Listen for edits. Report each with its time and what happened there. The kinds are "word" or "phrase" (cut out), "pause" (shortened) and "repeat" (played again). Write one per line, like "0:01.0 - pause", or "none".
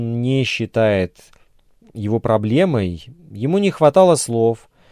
none